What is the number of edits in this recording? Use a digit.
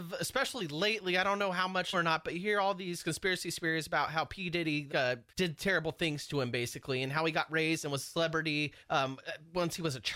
4